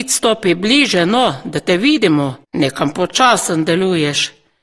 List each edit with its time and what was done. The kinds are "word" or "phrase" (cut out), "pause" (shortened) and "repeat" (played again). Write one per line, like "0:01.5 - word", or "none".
0:02.4 - pause